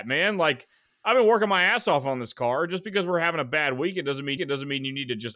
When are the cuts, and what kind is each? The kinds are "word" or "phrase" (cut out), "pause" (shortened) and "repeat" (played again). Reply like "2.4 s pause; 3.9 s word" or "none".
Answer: 4.4 s repeat